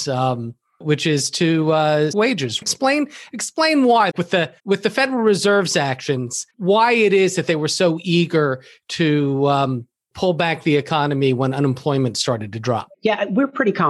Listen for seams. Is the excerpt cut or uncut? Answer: cut